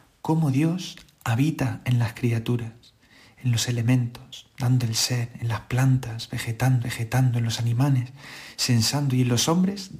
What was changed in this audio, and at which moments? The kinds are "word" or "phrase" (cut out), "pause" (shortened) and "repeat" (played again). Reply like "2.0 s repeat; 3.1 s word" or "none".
6.8 s repeat